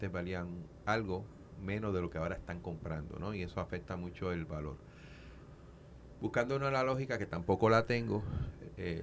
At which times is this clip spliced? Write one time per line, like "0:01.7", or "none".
none